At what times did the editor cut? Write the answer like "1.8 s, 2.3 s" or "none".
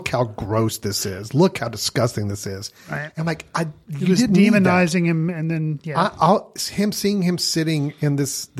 none